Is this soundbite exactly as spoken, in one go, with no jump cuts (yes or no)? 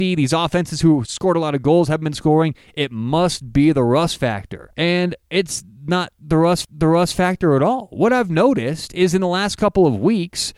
no